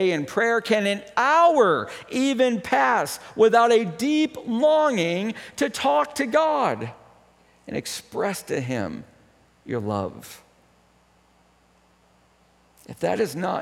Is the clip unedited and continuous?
yes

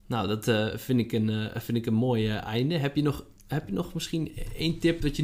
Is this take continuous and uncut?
yes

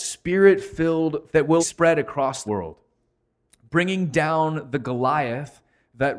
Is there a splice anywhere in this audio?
yes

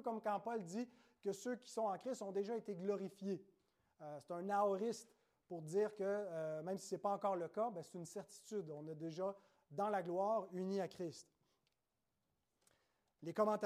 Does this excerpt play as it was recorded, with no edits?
yes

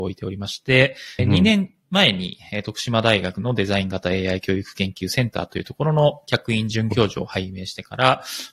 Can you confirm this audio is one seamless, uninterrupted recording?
no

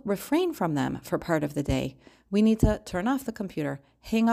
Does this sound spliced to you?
no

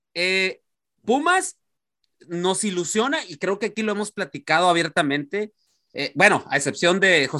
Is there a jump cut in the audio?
no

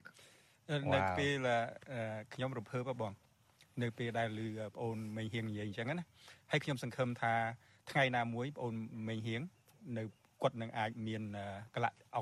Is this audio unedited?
yes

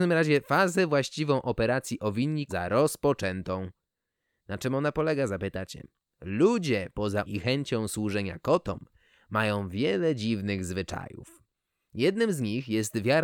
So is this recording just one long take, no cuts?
no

